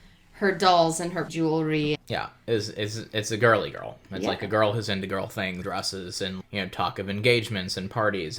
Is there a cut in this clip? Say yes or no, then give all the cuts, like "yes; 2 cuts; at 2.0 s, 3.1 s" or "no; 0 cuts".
yes; 4 cuts; at 1.3 s, 1.9 s, 5.6 s, 6.4 s